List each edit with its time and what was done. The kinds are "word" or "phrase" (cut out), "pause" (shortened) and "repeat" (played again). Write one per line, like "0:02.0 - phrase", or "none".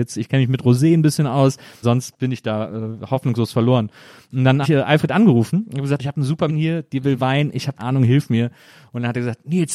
0:01.8 - word
0:04.6 - word
0:06.0 - word
0:06.5 - word
0:07.8 - word

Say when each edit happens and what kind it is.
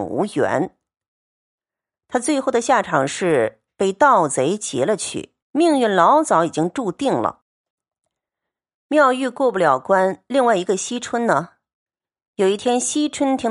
0:05.4 - pause

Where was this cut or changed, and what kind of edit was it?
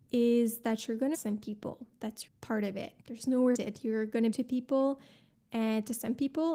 0:01.1 - word
0:02.3 - word
0:03.0 - pause
0:03.5 - word
0:04.3 - phrase

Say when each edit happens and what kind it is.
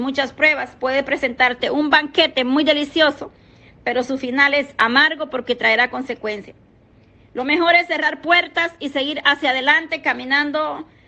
none

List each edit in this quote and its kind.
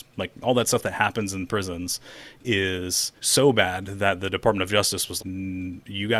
0:03.2 - pause
0:05.2 - word

